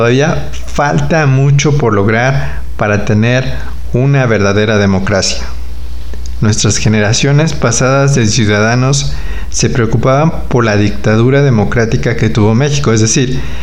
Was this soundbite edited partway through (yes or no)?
no